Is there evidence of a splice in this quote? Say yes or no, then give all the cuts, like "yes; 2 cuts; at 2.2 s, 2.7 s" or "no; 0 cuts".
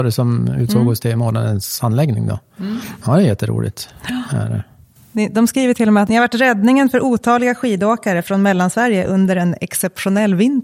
no; 0 cuts